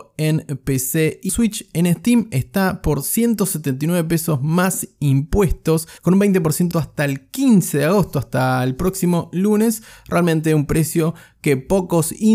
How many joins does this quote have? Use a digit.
3